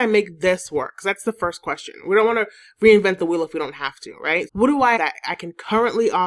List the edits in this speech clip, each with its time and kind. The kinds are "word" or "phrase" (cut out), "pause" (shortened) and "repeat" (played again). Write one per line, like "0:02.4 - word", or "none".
0:04.5 - word
0:05.0 - word